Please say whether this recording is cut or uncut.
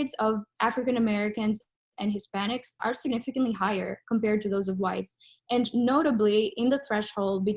cut